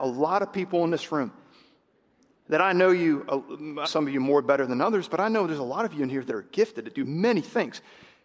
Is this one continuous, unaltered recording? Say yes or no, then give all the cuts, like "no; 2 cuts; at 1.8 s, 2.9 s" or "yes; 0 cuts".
no; 1 cut; at 3.8 s